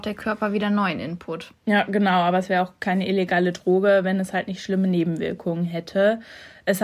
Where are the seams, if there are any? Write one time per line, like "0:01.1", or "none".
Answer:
none